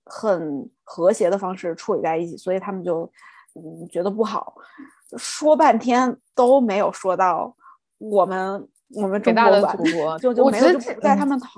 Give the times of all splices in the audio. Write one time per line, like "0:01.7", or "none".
0:10.2